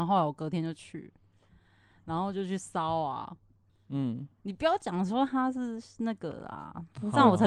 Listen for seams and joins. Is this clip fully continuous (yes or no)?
yes